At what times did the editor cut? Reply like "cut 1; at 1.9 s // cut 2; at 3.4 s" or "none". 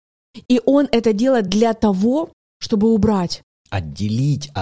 none